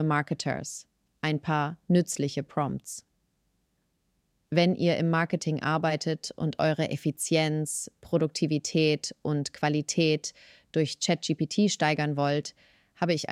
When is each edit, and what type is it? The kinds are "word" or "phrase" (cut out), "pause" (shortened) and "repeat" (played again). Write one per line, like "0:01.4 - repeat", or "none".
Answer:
none